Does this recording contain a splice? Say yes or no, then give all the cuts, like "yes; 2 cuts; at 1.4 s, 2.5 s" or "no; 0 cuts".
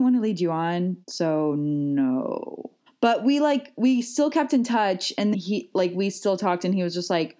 yes; 3 cuts; at 1.0 s, 2.9 s, 5.3 s